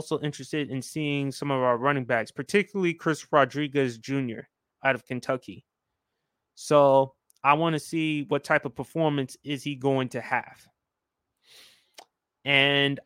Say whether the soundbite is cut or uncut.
uncut